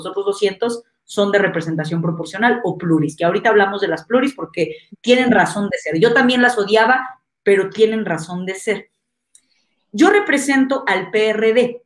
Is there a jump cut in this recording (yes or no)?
no